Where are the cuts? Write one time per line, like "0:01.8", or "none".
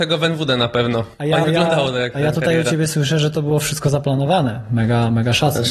0:01.4